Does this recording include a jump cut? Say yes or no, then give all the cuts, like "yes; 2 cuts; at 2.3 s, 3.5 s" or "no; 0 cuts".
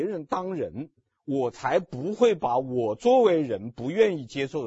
no; 0 cuts